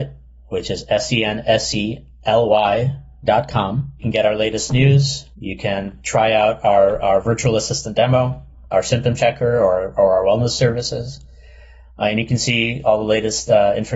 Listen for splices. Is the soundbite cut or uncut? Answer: uncut